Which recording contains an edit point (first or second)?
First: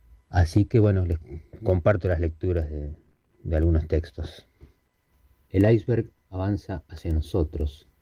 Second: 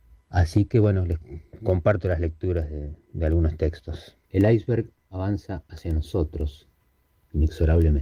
second